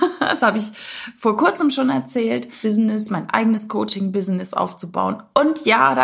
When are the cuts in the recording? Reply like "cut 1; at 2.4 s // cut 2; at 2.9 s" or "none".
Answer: cut 1; at 2.6 s